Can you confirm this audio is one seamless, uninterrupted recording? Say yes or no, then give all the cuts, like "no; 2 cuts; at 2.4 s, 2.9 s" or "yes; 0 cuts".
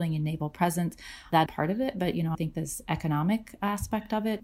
no; 2 cuts; at 1.5 s, 2.3 s